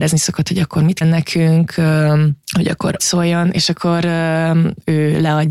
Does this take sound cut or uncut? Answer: cut